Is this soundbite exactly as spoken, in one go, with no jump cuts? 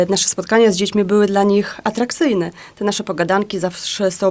yes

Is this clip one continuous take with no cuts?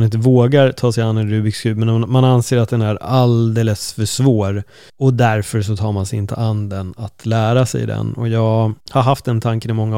no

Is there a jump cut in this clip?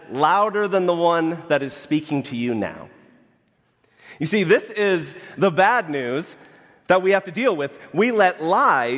no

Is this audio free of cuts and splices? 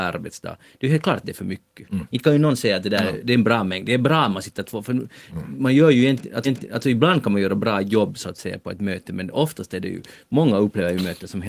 no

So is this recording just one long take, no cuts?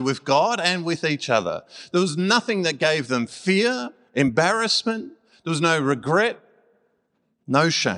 yes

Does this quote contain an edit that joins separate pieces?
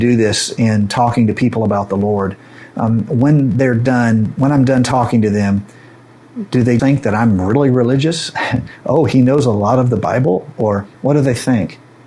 yes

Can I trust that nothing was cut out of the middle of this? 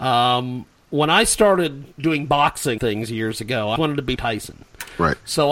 no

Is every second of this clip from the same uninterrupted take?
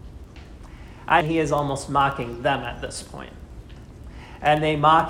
no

